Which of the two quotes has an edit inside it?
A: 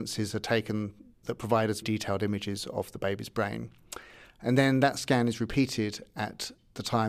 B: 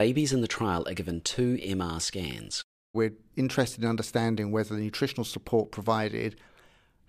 A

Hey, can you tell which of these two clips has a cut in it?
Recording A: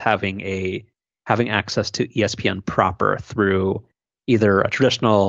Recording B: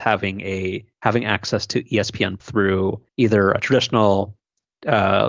B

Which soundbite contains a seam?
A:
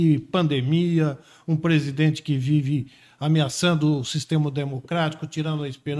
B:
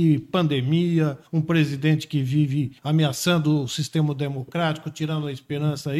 B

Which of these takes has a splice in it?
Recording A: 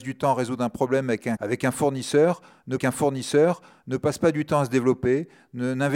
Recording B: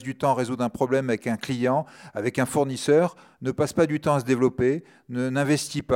A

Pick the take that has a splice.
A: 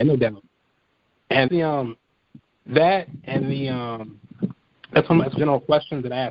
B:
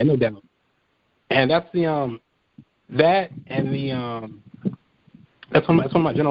A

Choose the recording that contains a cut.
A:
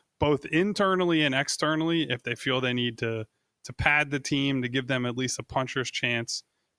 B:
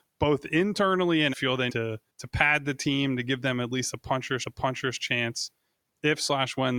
B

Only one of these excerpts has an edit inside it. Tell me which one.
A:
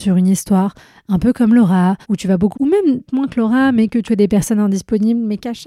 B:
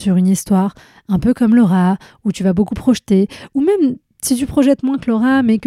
A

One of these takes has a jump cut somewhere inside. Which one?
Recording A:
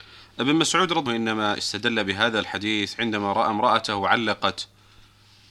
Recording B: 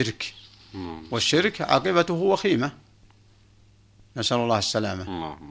A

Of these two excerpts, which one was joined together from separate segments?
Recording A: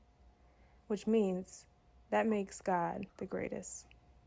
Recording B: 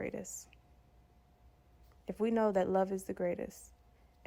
A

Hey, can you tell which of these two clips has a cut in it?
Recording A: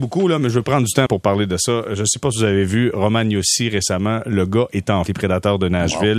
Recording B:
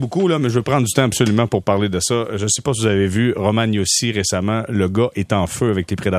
A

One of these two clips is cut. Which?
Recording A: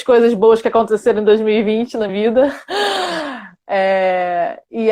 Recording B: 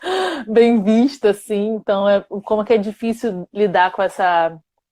A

